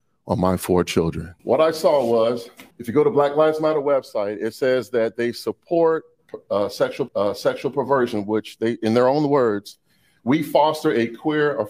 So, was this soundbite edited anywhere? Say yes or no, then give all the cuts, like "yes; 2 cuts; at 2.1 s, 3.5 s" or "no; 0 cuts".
yes; 3 cuts; at 1.4 s, 2.7 s, 7.1 s